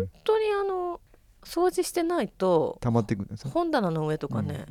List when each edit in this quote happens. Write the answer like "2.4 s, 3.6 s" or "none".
none